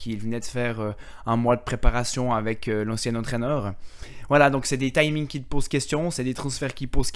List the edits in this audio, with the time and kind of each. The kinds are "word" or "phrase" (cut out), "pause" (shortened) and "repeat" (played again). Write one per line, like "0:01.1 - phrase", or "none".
none